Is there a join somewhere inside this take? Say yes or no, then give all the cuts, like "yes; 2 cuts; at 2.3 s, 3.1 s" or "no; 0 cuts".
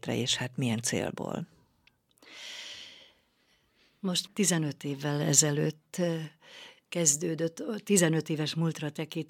yes; 1 cut; at 4.3 s